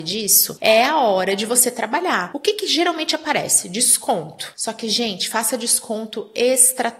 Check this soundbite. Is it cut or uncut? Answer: uncut